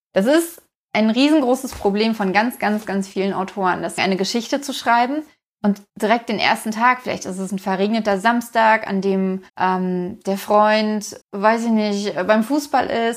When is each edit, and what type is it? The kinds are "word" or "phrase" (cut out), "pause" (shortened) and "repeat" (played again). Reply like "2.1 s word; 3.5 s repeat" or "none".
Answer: 2.8 s word; 4.0 s phrase; 5.9 s pause; 9.5 s pause; 11.2 s pause